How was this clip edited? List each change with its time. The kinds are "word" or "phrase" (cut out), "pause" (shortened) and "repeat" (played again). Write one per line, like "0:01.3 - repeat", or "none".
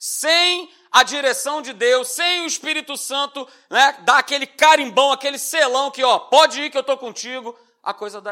none